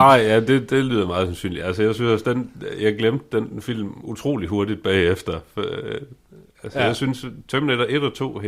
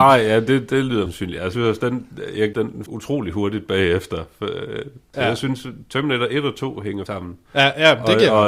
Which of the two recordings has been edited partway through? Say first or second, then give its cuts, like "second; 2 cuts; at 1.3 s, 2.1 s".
second; 6 cuts; at 1.1 s, 1.5 s, 2.5 s, 2.9 s, 5.1 s, 7.1 s